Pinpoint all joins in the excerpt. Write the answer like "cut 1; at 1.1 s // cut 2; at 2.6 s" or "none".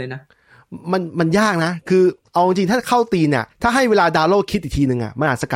cut 1; at 3.5 s